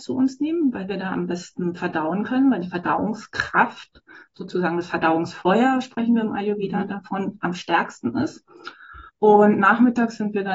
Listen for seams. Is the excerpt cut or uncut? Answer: cut